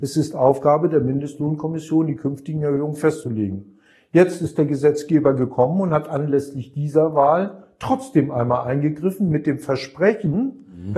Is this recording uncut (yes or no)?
yes